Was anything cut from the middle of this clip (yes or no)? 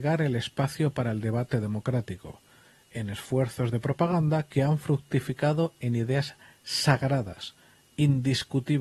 no